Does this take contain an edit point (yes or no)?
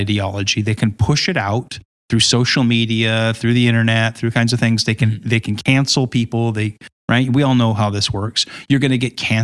no